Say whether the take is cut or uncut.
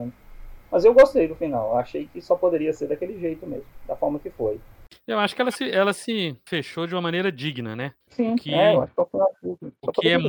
cut